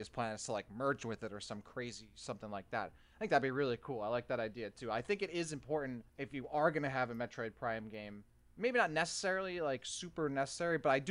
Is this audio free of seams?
no; 1 cut; at 6.1 s

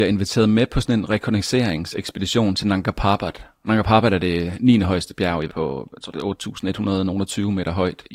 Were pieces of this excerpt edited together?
yes; 1 cut; at 5.5 s

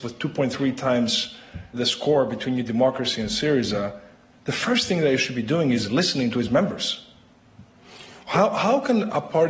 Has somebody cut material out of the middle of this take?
yes; 1 cut; at 1.7 s

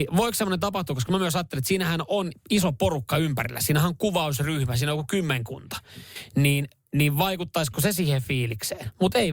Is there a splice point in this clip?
yes; 1 cut; at 2.4 s

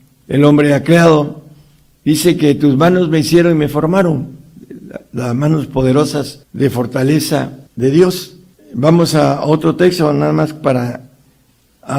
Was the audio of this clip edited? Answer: yes; 3 cuts; at 6.4 s, 7.7 s, 8.5 s

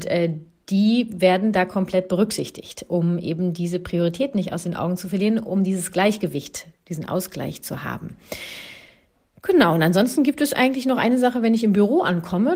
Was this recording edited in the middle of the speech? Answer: no; 0 cuts

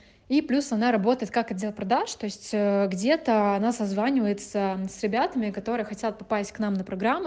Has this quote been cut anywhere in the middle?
no; 0 cuts

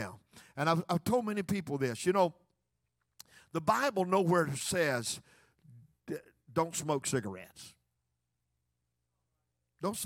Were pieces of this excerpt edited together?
no; 0 cuts

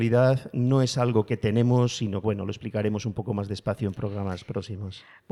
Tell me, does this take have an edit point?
yes; 1 cut; at 2.2 s

